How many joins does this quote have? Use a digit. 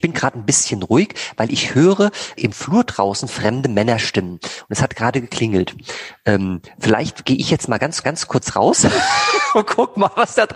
2